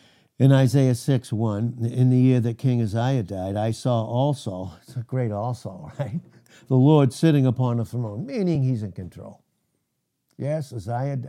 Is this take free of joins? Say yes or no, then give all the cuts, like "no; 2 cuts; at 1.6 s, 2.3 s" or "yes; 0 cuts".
yes; 0 cuts